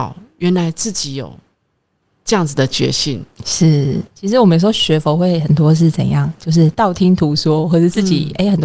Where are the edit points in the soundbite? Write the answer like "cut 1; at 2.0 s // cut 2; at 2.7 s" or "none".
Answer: none